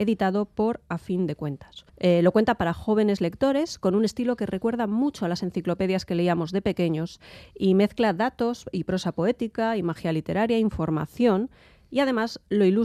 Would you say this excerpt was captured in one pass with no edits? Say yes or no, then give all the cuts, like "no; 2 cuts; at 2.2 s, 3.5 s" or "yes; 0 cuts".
no; 1 cut; at 1.9 s